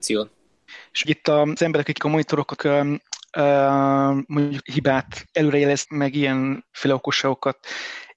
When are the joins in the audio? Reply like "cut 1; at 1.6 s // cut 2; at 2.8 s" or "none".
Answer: cut 1; at 1.0 s // cut 2; at 1.6 s // cut 3; at 2.0 s // cut 4; at 2.6 s // cut 5; at 4.6 s // cut 6; at 5.9 s